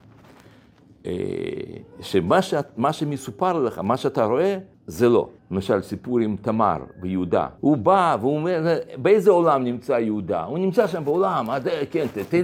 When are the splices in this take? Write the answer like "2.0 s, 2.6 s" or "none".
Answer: 4.7 s, 5.4 s, 7.6 s